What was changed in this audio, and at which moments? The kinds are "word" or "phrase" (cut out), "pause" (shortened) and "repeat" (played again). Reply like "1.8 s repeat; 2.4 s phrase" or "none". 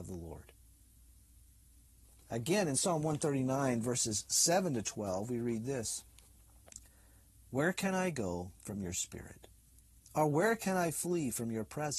none

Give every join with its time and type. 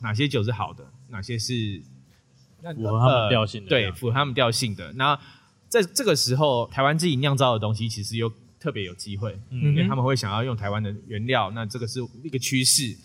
6.7 s phrase

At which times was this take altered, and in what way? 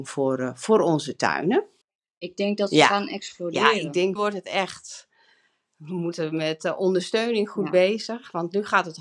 1.8 s pause; 4.2 s word

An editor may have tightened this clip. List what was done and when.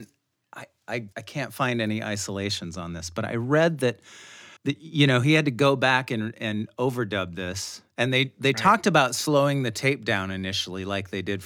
1.1 s pause; 4.6 s pause

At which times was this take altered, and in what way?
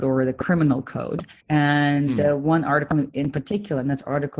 1.4 s pause; 3.1 s word

